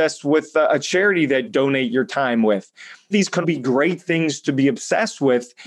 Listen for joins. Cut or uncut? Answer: cut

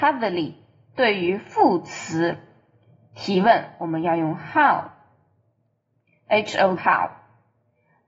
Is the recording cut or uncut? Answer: cut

